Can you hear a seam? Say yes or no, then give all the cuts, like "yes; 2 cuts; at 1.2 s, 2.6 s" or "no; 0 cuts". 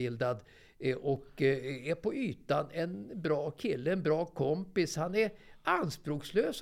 no; 0 cuts